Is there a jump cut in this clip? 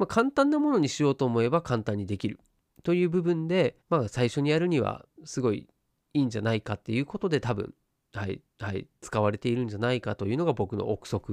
yes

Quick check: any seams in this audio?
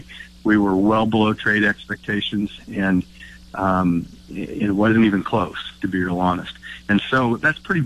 no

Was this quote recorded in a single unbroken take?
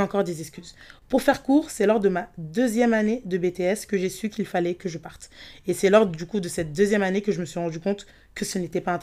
yes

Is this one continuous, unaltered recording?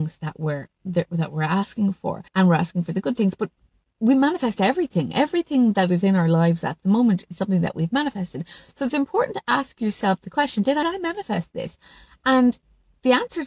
no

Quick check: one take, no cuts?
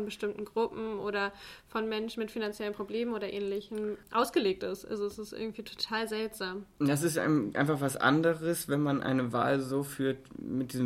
yes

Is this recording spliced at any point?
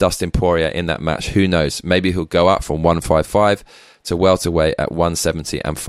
no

